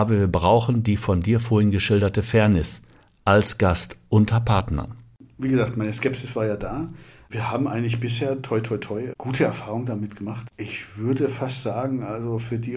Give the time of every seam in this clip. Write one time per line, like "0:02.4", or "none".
none

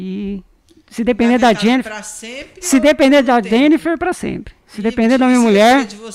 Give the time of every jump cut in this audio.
none

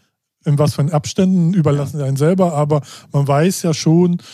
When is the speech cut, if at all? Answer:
none

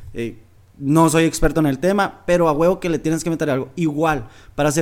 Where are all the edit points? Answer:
none

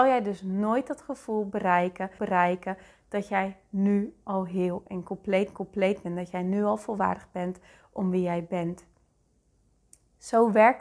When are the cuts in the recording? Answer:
0:02.2
0:05.5

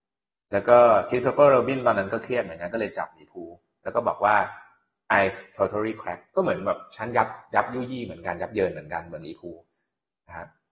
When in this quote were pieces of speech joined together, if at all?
none

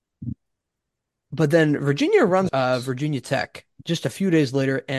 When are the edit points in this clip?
0:02.5

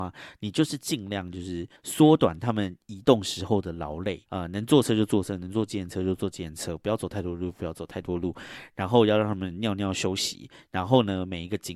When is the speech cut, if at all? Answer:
0:01.8
0:04.3

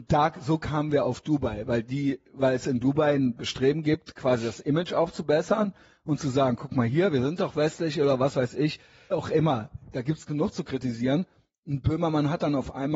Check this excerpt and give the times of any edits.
0:09.1

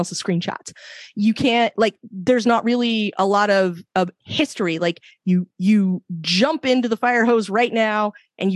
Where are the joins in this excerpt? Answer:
none

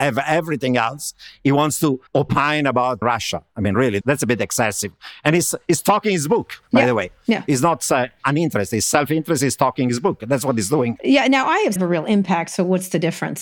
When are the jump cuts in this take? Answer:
0:02.1
0:03.0
0:04.0
0:11.8

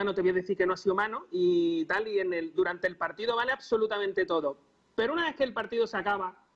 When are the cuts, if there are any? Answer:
none

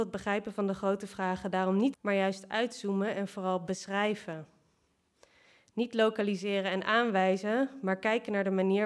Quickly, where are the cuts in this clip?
0:01.9

